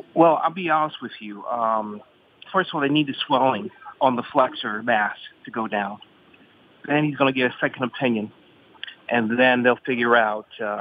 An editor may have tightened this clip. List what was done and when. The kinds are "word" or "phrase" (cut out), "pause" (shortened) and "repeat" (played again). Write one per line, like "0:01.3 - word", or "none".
0:02.5 - word
0:04.0 - pause